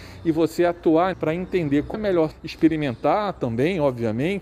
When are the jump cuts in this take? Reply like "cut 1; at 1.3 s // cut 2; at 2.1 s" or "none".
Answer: cut 1; at 1.1 s // cut 2; at 1.9 s // cut 3; at 2.3 s